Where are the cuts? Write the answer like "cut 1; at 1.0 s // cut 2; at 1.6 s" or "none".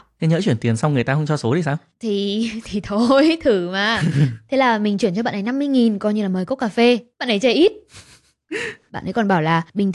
none

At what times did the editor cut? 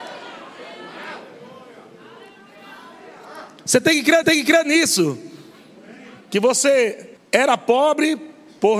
cut 1; at 4.2 s // cut 2; at 7.2 s

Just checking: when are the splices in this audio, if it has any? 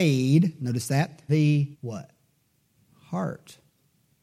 cut 1; at 1.3 s // cut 2; at 1.7 s

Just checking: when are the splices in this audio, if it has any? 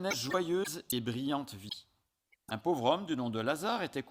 none

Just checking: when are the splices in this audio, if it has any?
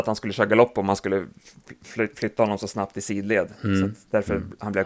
none

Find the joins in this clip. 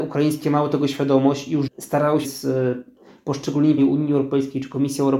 cut 1; at 1.7 s // cut 2; at 2.2 s // cut 3; at 3.8 s

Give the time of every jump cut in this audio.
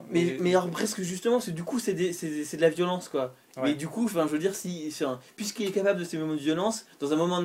none

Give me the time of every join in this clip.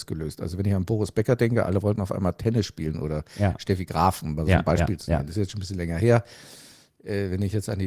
none

